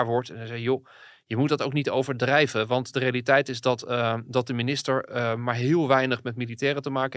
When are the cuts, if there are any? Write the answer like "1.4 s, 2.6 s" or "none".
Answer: none